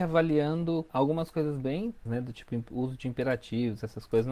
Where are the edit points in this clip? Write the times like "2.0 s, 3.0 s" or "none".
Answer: 0.9 s, 2.1 s

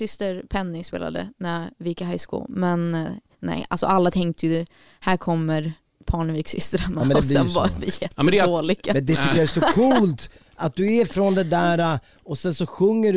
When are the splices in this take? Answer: none

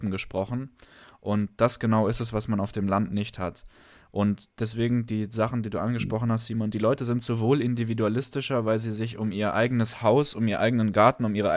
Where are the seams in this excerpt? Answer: none

